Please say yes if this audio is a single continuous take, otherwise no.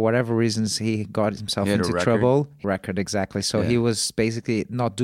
no